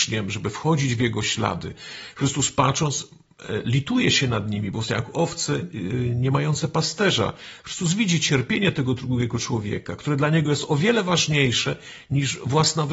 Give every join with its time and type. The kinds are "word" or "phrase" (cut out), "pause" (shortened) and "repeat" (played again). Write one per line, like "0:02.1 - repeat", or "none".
none